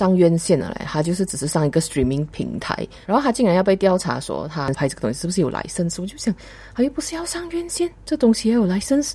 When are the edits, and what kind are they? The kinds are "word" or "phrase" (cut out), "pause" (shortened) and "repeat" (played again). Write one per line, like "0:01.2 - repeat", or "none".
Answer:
0:03.0 - pause